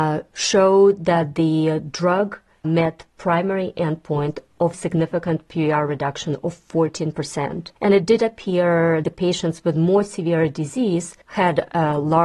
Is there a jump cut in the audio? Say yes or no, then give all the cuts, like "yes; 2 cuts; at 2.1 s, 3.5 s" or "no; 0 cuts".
yes; 5 cuts; at 2.6 s, 4.7 s, 7.8 s, 9.0 s, 11.2 s